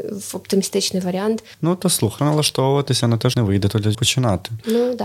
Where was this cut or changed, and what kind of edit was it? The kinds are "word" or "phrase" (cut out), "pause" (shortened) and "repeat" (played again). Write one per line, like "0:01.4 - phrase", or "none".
0:02.2 - word
0:03.3 - word
0:03.9 - word

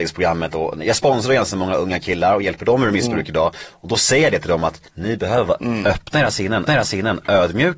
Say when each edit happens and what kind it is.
0:04.9 - pause
0:05.6 - word
0:06.7 - repeat

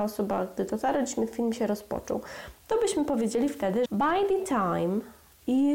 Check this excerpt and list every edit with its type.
0:03.9 - word

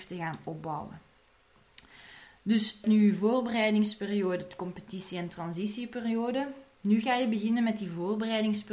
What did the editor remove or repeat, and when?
0:02.8 - word

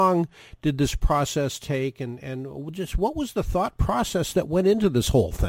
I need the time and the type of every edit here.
none

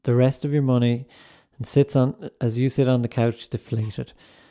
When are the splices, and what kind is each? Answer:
none

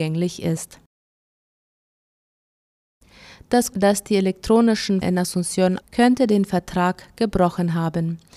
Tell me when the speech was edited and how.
0:03.7 - word
0:05.0 - word
0:05.8 - word

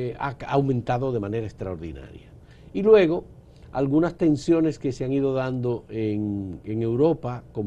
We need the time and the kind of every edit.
none

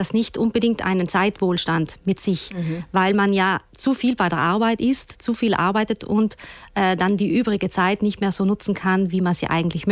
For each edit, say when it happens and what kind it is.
none

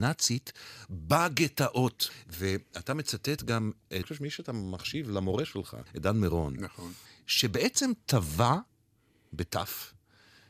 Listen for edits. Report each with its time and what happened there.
0:04.0 - phrase
0:05.9 - pause
0:07.1 - pause

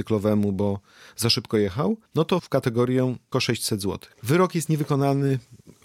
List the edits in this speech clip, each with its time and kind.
0:02.1 - pause
0:02.4 - word
0:03.3 - word
0:04.1 - pause

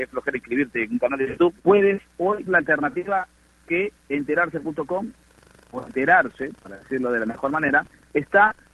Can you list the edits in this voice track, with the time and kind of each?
0:01.6 - phrase
0:02.5 - word
0:04.0 - pause

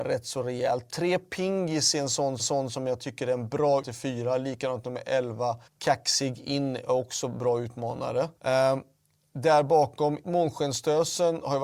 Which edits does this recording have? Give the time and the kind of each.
0:02.4 - repeat
0:03.8 - word
0:05.7 - pause
0:08.4 - pause
0:10.2 - word

